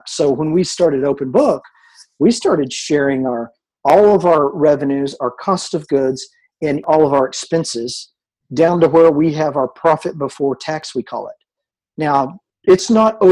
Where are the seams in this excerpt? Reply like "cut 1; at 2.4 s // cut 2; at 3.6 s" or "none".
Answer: cut 1; at 6.8 s